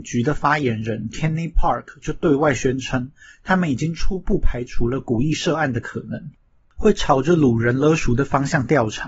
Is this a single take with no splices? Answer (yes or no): yes